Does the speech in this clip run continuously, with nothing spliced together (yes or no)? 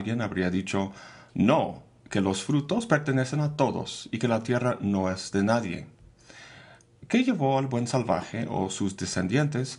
yes